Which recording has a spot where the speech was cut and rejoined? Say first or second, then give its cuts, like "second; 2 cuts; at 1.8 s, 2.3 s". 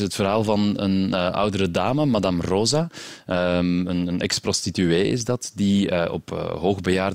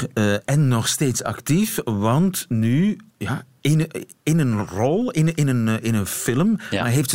second; 1 cut; at 3.1 s